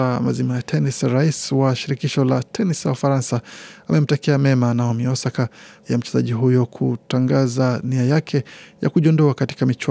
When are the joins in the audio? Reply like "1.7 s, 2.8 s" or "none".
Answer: 5.8 s